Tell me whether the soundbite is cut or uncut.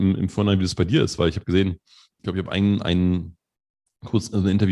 uncut